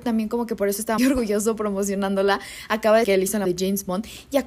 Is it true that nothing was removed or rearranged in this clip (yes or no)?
no